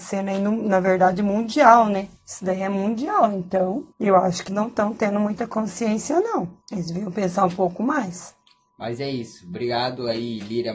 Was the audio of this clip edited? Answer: yes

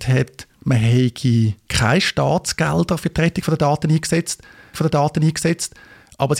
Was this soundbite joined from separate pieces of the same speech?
yes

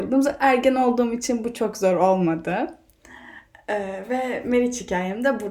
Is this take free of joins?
yes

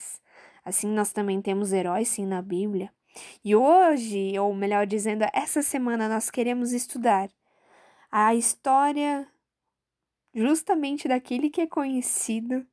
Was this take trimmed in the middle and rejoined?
no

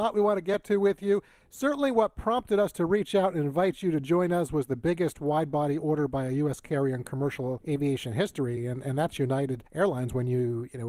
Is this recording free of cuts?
yes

